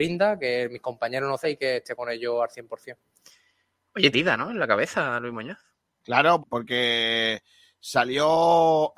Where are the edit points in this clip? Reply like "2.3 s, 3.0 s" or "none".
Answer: 1.4 s, 4.1 s, 6.4 s